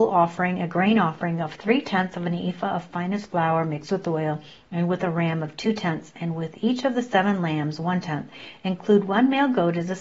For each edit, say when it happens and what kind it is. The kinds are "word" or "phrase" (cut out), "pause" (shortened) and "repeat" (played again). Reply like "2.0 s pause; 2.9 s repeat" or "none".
none

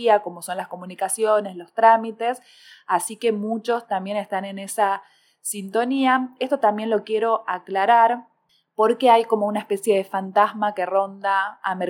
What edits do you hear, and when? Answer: none

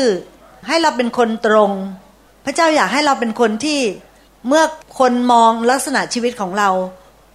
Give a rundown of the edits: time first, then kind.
2.3 s pause

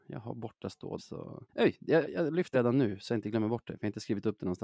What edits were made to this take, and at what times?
1.0 s word; 1.5 s pause; 2.0 s word; 2.5 s word

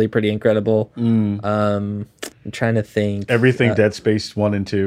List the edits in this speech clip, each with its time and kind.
2.3 s pause; 3.7 s word

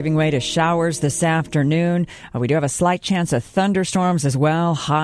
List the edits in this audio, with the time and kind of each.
none

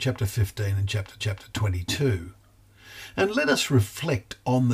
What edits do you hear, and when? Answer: 1.2 s repeat

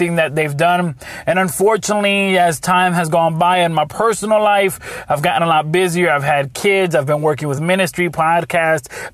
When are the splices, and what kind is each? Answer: none

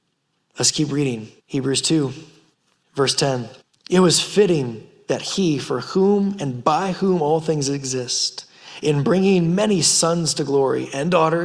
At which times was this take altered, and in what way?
1.4 s pause; 2.5 s pause; 3.6 s pause

